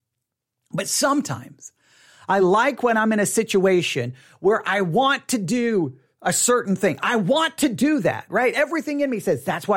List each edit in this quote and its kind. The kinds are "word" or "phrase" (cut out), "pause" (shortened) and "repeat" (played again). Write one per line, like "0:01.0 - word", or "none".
none